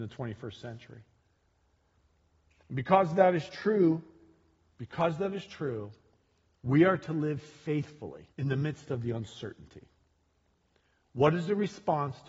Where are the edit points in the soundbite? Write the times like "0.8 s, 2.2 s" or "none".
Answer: 8.3 s